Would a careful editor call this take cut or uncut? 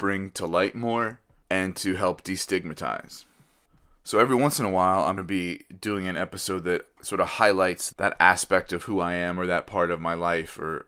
cut